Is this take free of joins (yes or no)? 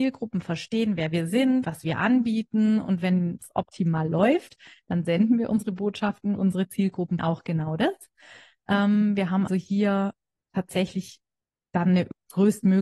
no